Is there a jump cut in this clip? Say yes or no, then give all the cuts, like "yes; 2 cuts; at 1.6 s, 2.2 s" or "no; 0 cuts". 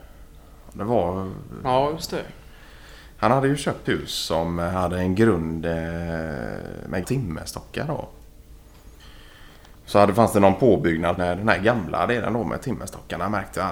yes; 3 cuts; at 3.8 s, 7.0 s, 11.2 s